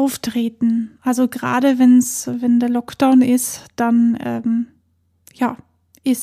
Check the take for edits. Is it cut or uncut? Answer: uncut